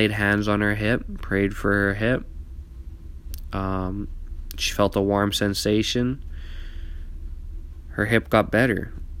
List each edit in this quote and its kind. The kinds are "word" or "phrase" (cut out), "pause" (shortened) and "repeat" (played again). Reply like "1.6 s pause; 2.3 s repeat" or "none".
none